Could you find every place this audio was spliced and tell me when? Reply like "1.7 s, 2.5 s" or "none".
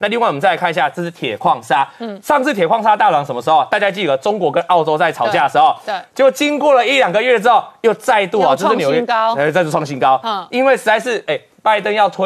none